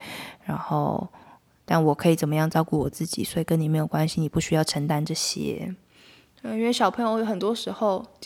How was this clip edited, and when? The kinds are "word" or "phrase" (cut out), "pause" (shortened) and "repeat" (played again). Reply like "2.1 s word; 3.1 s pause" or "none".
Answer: none